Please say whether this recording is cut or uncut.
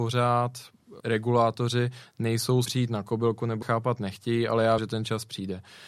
cut